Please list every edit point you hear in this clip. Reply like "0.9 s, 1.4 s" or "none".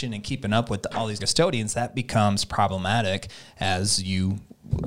1.2 s